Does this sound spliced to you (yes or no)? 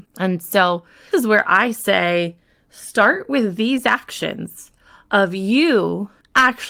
yes